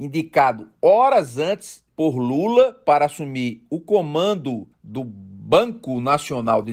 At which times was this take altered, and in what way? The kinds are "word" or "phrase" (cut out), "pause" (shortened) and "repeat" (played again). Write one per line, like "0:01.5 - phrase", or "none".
0:01.9 - pause
0:04.7 - pause